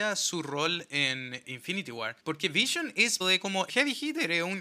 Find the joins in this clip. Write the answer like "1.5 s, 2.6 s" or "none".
1.4 s, 2.2 s, 3.2 s, 3.7 s